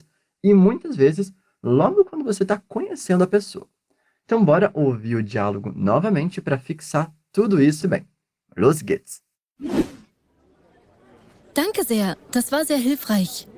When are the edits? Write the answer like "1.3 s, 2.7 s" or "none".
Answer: 7.8 s

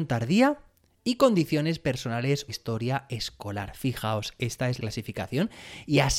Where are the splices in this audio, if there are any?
2.5 s, 4.8 s

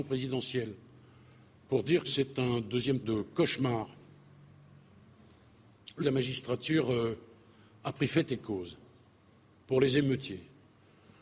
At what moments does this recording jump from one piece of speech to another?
2.0 s, 3.0 s, 6.0 s

